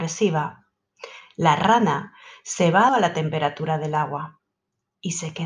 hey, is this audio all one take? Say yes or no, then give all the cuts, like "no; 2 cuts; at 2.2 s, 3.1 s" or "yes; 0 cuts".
no; 1 cut; at 2.9 s